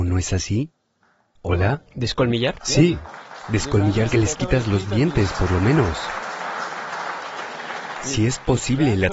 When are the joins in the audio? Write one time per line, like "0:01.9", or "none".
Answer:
0:04.1